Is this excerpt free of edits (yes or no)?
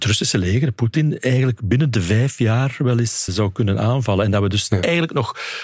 no